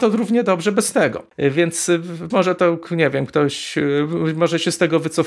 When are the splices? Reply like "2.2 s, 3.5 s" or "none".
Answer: 2.3 s